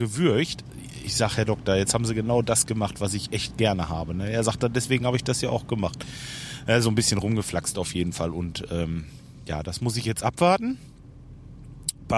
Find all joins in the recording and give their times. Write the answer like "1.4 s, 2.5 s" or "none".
none